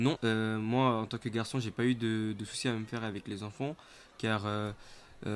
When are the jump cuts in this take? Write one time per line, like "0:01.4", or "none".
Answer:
none